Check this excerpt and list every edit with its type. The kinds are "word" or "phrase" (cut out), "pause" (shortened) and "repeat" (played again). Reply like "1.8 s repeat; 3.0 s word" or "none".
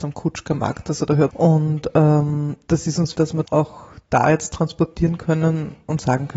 1.3 s phrase; 3.1 s word; 3.4 s word